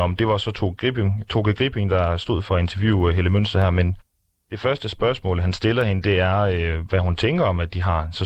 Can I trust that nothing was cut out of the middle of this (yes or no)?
yes